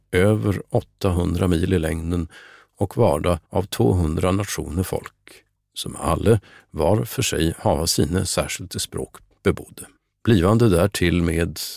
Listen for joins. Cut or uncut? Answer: cut